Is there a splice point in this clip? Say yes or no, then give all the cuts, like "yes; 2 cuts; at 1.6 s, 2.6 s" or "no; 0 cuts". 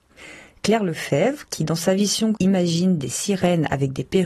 yes; 1 cut; at 2.4 s